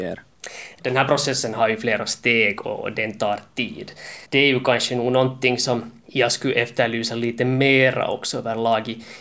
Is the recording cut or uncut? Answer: cut